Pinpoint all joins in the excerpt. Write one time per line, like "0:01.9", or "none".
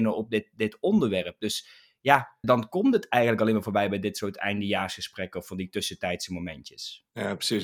0:02.4